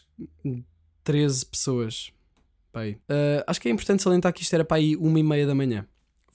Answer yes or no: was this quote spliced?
yes